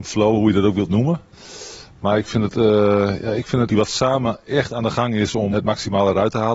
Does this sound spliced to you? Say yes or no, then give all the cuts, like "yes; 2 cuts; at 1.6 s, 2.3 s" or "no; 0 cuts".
yes; 2 cuts; at 3.7 s, 5.5 s